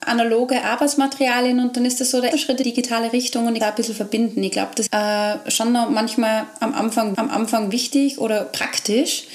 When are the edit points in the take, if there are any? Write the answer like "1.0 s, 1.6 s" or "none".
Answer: 2.3 s, 2.6 s, 3.6 s, 4.9 s, 7.1 s